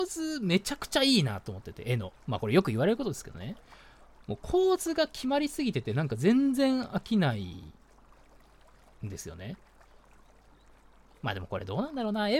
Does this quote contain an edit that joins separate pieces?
no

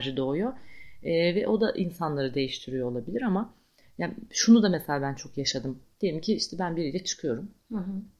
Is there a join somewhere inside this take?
no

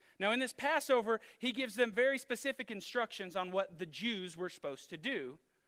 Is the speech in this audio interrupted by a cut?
no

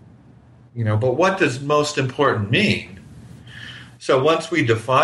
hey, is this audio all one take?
yes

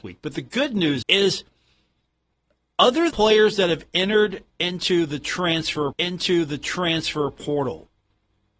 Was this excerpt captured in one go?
no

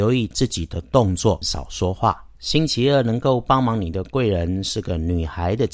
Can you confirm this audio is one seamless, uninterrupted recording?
no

